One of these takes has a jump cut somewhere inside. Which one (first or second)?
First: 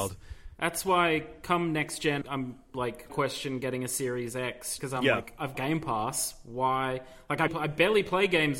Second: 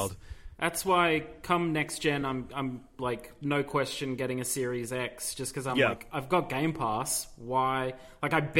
first